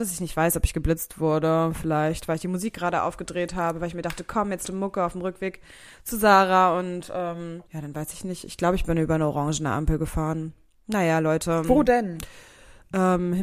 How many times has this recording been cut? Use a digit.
2